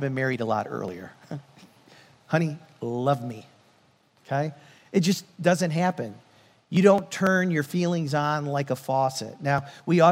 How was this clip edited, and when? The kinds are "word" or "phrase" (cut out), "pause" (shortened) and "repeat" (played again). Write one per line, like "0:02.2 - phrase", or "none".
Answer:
none

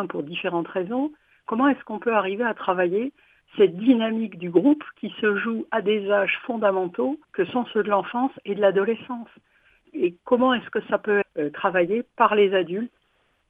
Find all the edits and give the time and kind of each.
0:03.4 - word
0:07.2 - pause
0:09.8 - word
0:11.2 - word

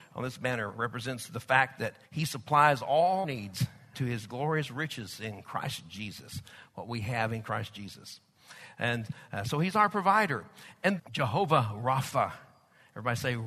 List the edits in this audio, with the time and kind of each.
0:02.1 - pause
0:03.2 - word
0:03.9 - word
0:11.0 - word

